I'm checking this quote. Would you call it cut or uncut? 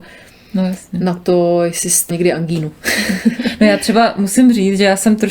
cut